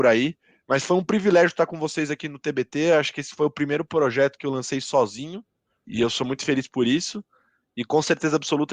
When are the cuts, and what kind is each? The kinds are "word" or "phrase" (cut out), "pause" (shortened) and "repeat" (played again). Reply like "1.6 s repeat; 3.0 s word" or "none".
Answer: 5.8 s word

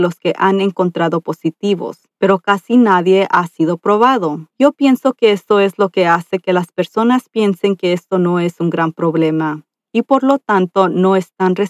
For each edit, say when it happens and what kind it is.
2.1 s pause; 4.5 s pause

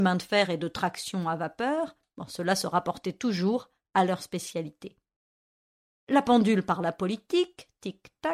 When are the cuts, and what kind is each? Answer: none

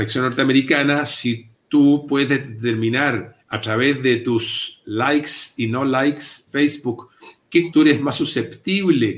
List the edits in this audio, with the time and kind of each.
1.5 s pause; 3.4 s pause; 6.5 s word; 7.7 s word

